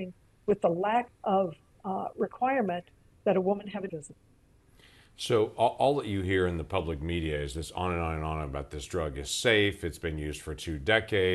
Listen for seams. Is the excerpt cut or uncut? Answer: cut